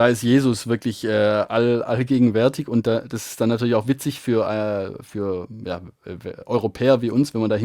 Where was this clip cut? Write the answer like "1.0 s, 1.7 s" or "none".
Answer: none

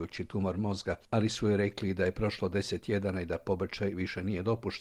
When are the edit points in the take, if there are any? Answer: none

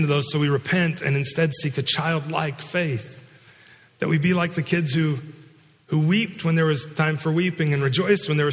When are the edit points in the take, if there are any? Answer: none

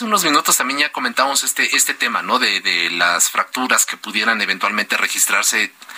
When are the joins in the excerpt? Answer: none

